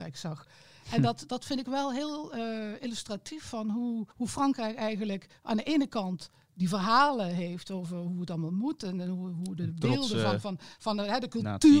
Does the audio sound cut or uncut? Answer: cut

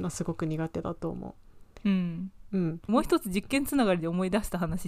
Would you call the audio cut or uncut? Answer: cut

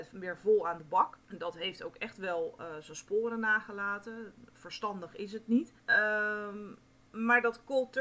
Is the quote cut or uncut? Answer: cut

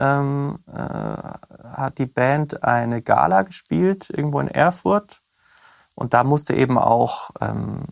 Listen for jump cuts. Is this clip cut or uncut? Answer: uncut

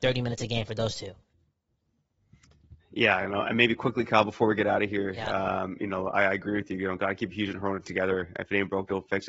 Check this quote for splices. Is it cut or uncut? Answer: uncut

